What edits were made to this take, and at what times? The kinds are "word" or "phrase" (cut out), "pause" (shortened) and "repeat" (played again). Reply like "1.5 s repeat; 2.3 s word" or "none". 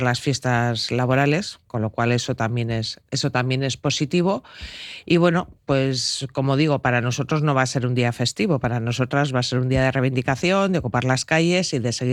3.1 s pause